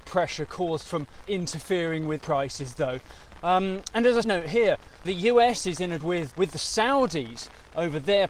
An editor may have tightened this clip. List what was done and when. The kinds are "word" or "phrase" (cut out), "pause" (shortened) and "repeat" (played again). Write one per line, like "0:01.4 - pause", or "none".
0:01.3 - word
0:02.2 - word
0:04.2 - word
0:05.0 - word
0:06.0 - word
0:06.3 - word